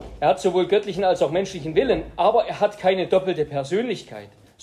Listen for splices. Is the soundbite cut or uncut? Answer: uncut